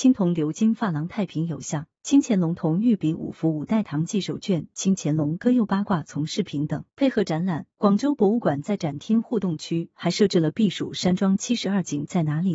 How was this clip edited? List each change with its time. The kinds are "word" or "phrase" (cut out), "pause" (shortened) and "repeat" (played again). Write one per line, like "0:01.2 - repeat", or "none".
0:02.0 - pause
0:06.9 - pause
0:07.7 - pause

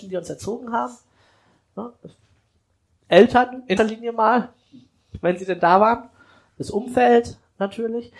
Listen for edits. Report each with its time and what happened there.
0:03.8 - word

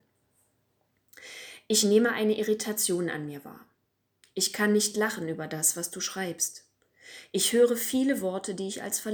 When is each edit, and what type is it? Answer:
none

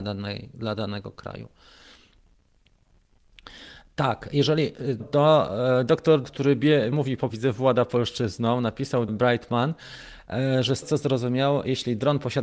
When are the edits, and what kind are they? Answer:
0:05.0 - word
0:06.2 - word
0:06.9 - word
0:07.3 - word
0:09.1 - word
0:10.8 - word

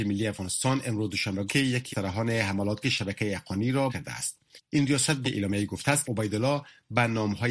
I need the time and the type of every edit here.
0:01.5 - word
0:01.9 - word
0:02.8 - word
0:03.9 - word
0:05.2 - word
0:06.0 - word

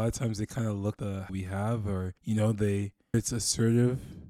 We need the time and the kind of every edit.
0:01.0 - word
0:01.3 - phrase
0:02.2 - pause
0:03.1 - word

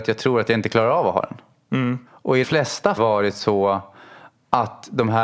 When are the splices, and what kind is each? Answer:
0:02.1 - pause
0:02.4 - word
0:03.0 - phrase

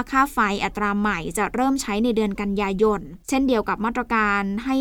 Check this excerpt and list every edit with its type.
0:03.2 - pause

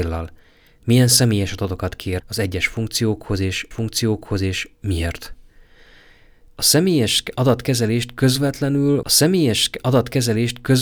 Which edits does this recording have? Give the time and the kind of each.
0:02.2 - word
0:03.7 - repeat
0:09.0 - repeat

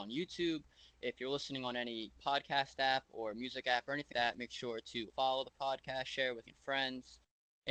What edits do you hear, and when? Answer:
0:04.1 - word
0:05.1 - word
0:06.5 - word

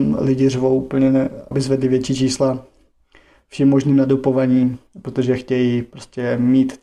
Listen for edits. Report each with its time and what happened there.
0:01.5 - word

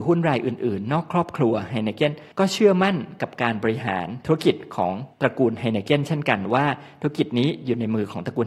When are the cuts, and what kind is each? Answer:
0:02.3 - pause
0:05.1 - pause

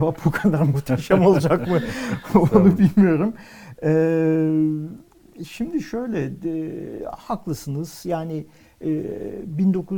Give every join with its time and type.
none

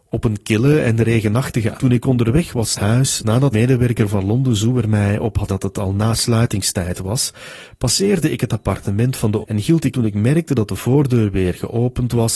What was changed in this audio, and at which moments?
0:01.8 - word
0:02.8 - word
0:03.5 - word
0:05.5 - word
0:09.4 - word
0:09.9 - word

